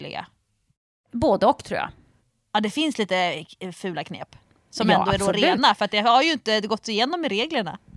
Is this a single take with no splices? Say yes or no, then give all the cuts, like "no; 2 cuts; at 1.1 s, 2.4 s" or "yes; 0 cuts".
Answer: yes; 0 cuts